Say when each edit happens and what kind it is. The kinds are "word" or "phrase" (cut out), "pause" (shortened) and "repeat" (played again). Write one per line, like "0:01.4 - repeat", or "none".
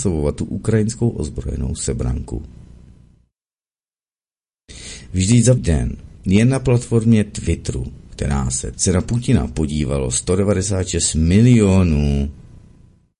0:05.6 - word
0:06.1 - pause
0:08.7 - phrase